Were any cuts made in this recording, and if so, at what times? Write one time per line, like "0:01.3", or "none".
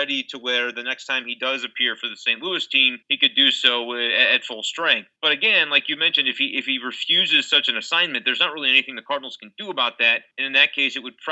0:03.0
0:05.2
0:10.3